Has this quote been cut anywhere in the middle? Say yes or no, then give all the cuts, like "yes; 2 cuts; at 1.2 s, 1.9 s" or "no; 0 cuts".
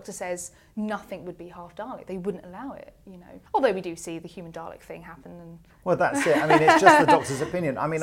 yes; 2 cuts; at 3.5 s, 5.7 s